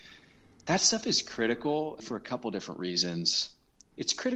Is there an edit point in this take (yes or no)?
no